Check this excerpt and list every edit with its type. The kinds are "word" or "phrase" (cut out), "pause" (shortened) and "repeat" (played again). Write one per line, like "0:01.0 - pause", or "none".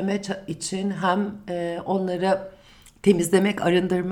none